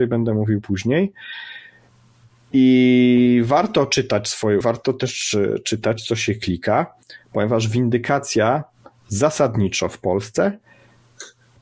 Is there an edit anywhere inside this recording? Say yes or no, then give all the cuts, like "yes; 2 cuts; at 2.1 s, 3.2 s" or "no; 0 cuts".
yes; 1 cut; at 4.6 s